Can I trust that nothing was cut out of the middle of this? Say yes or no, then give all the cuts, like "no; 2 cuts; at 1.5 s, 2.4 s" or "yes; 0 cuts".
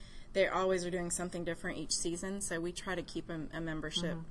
yes; 0 cuts